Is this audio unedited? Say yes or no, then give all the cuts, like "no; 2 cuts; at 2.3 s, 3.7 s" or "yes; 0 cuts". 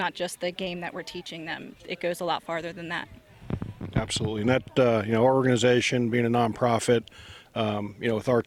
yes; 0 cuts